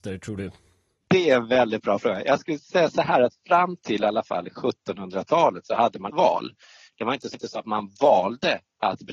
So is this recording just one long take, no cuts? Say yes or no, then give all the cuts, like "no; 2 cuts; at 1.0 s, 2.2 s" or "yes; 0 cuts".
no; 2 cuts; at 6.1 s, 7.3 s